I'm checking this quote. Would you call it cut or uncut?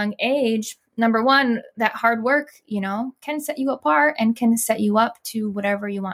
uncut